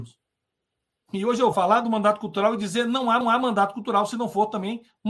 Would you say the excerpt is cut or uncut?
cut